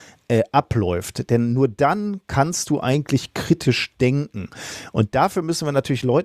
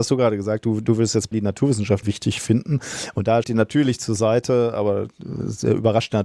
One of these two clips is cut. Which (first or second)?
second